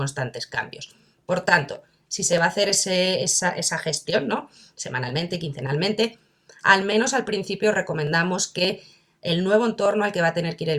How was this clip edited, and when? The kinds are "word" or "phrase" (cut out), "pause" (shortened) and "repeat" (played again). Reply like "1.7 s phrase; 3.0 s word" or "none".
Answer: none